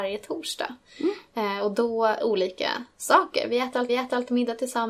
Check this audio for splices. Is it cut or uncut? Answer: cut